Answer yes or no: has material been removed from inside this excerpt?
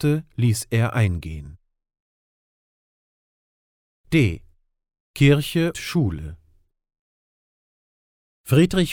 yes